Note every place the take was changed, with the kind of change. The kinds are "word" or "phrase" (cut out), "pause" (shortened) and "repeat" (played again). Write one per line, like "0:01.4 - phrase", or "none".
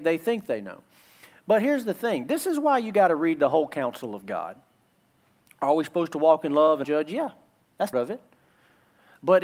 0:06.8 - word
0:07.9 - word